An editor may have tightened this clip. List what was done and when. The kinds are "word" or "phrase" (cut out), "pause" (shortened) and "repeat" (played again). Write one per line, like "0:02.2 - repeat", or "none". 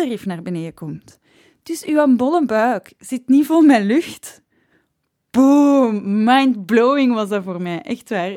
none